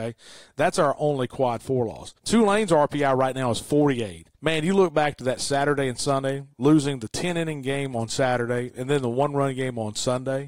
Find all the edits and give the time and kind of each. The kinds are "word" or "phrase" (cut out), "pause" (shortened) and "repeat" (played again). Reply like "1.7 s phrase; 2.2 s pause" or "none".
2.2 s pause; 4.3 s pause